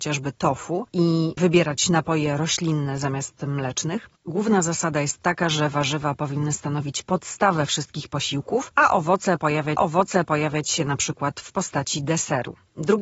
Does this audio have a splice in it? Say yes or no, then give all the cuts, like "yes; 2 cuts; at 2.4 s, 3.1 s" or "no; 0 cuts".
yes; 1 cut; at 9.8 s